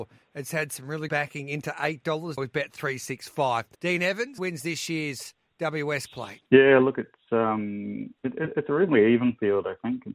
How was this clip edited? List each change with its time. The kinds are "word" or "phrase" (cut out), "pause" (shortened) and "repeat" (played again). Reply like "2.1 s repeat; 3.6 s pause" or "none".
1.1 s word; 2.4 s word; 3.7 s pause; 4.4 s word; 6.1 s word; 6.5 s pause; 8.2 s pause